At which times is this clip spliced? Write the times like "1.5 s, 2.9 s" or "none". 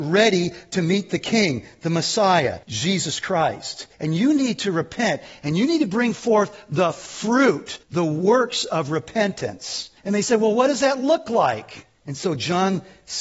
2.6 s, 3.9 s, 7.8 s, 10.0 s, 12.0 s